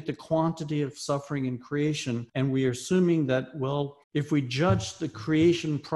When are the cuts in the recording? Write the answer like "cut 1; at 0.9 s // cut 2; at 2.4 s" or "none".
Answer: cut 1; at 2.3 s // cut 2; at 4.0 s